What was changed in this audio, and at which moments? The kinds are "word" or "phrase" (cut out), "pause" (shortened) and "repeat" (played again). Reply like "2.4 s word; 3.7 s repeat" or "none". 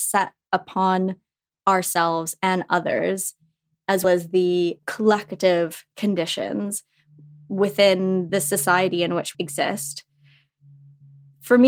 4.0 s word; 8.3 s word; 9.3 s word